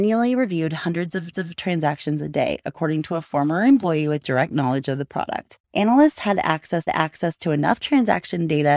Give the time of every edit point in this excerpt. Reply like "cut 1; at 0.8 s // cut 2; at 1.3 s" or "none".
cut 1; at 1.3 s // cut 2; at 6.9 s

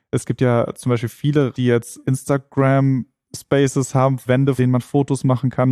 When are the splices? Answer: cut 1; at 1.5 s // cut 2; at 2.0 s // cut 3; at 4.3 s // cut 4; at 4.6 s

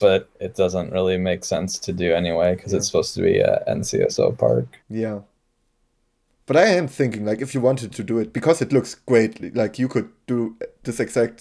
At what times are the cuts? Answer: cut 1; at 4.8 s

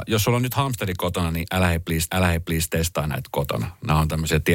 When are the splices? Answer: cut 1; at 2.1 s

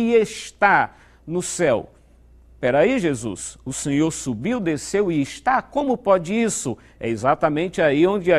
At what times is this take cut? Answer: none

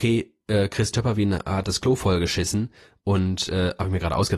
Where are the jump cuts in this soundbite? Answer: none

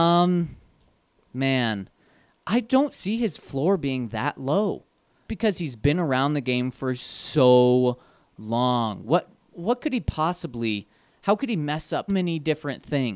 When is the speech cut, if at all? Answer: cut 1; at 5.3 s // cut 2; at 12.1 s

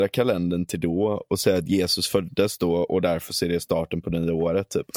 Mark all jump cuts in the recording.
none

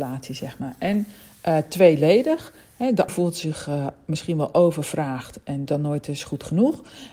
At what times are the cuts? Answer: cut 1; at 3.1 s // cut 2; at 5.7 s

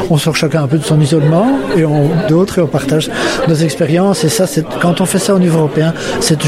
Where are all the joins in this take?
cut 1; at 2.3 s

